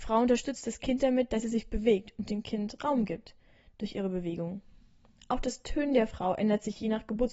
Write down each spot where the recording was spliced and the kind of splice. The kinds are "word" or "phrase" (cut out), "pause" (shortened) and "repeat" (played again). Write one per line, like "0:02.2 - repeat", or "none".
none